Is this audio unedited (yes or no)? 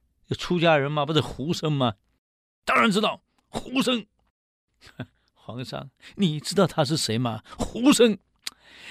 yes